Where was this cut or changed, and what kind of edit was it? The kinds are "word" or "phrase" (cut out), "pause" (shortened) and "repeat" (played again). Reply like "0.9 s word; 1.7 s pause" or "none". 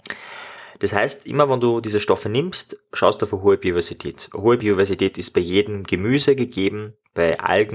none